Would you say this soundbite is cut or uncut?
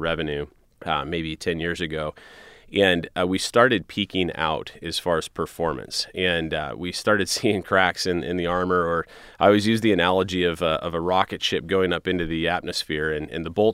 uncut